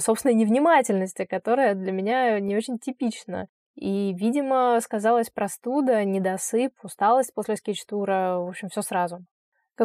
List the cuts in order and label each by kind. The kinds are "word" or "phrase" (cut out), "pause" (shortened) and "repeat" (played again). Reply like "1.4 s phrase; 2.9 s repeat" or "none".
none